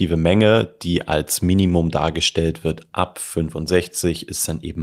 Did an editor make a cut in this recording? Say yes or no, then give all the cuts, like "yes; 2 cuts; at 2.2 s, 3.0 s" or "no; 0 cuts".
no; 0 cuts